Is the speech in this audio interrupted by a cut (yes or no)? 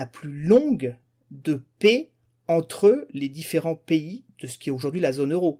no